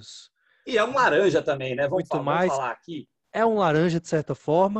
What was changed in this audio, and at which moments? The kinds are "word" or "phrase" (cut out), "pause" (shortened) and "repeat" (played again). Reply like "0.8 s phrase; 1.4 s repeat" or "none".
none